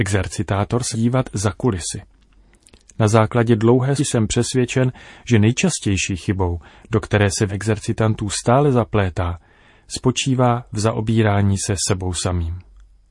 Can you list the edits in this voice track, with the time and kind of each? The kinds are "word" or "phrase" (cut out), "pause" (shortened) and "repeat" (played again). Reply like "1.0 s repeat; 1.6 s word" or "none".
0.9 s word; 4.0 s word; 7.5 s word